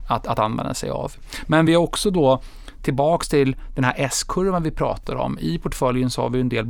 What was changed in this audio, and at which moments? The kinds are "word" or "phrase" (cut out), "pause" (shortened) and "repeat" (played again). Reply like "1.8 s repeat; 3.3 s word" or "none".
none